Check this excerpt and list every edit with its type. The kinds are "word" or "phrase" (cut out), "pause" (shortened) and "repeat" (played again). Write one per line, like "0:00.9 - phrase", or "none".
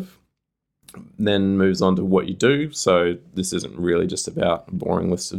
none